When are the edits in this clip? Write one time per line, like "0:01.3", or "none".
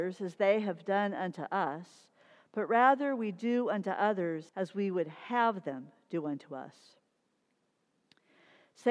0:04.5